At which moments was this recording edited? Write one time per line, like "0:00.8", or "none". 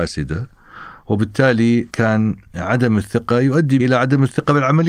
0:03.8